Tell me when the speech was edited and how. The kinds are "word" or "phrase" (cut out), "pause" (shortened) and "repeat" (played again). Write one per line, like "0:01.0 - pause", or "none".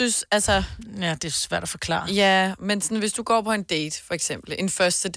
none